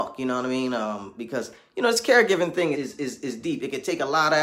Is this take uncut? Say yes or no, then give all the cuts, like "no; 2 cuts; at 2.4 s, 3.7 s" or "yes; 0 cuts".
no; 1 cut; at 2.7 s